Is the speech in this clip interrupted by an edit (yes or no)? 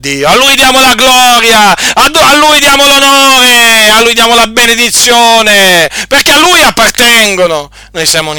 no